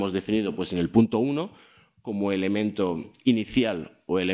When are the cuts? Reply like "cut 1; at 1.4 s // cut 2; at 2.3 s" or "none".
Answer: none